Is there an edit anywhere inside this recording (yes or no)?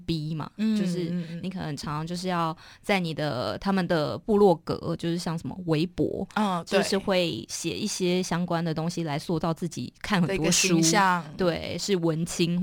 no